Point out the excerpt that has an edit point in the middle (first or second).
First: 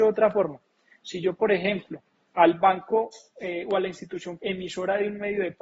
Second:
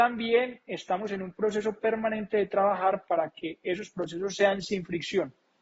first